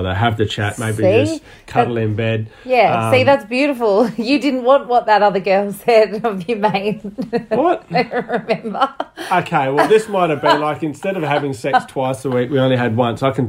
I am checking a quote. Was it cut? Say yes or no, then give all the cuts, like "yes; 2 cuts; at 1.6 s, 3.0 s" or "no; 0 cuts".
no; 0 cuts